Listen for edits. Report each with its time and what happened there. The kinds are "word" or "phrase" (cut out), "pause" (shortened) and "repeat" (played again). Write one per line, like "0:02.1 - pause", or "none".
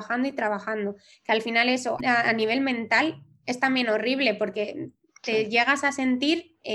none

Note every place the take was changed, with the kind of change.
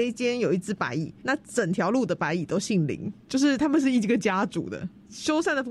0:01.2 - pause
0:03.2 - pause

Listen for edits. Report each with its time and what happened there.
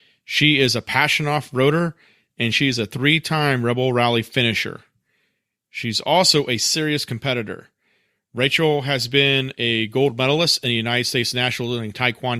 none

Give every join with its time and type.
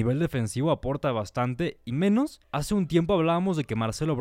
0:01.9 - word
0:02.4 - pause

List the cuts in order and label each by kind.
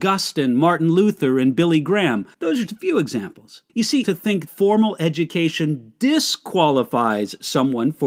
0:02.3 - pause
0:02.7 - word
0:03.7 - pause
0:04.0 - phrase
0:04.5 - word

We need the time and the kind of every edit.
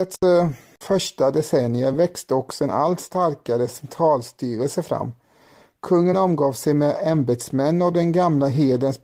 none

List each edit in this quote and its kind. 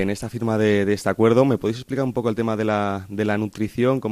none

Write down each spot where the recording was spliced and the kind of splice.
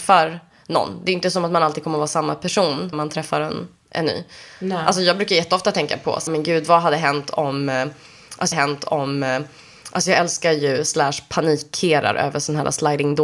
0:02.9 - word
0:06.3 - word
0:08.5 - repeat

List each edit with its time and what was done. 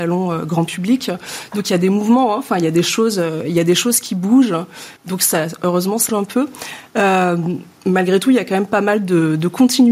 0:05.0 - pause
0:06.1 - word

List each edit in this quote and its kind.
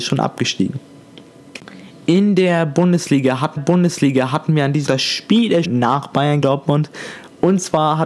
0:03.6 - repeat
0:04.9 - word
0:05.6 - word
0:06.4 - word

